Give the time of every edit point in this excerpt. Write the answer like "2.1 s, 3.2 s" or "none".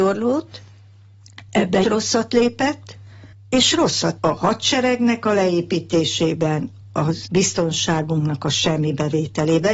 1.8 s, 3.3 s, 4.2 s, 7.3 s